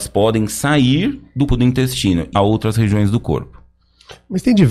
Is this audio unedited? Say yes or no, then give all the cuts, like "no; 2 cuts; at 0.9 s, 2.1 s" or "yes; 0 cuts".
no; 2 cuts; at 1.5 s, 2.3 s